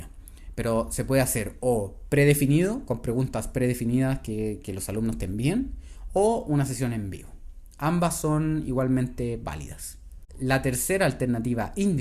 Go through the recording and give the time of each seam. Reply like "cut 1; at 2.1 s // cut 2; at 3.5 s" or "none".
none